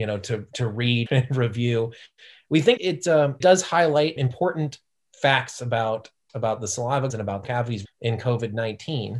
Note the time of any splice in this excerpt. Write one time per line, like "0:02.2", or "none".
0:01.1
0:02.8
0:03.4
0:04.2
0:06.3
0:07.1
0:07.4
0:07.8